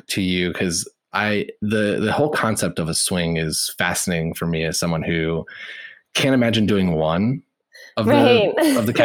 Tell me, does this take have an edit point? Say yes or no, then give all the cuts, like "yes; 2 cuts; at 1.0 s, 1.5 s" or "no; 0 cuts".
no; 0 cuts